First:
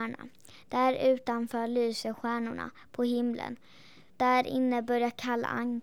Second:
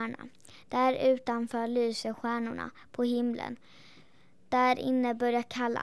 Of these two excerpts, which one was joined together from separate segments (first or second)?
first